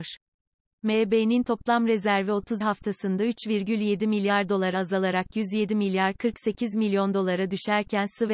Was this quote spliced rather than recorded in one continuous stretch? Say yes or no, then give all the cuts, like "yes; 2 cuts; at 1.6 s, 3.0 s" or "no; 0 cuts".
yes; 1 cut; at 2.6 s